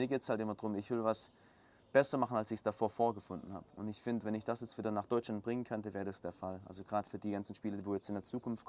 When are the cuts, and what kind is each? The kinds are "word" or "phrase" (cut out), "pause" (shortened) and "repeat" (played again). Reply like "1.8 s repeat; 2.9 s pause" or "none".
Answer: 3.7 s pause